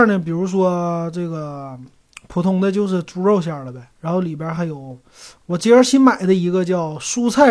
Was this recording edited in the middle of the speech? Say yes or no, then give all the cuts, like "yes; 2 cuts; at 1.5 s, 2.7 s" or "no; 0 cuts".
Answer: yes; 1 cut; at 3.9 s